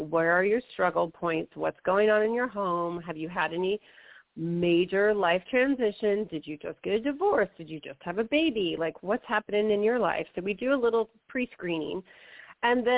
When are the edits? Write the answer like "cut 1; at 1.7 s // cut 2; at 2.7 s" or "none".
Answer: none